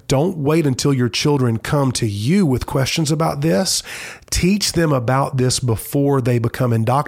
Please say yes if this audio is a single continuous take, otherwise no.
yes